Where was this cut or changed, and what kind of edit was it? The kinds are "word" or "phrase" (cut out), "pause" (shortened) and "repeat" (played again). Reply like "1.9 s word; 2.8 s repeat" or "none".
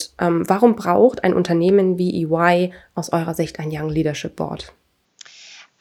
none